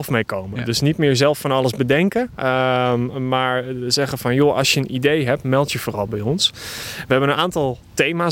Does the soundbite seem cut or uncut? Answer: uncut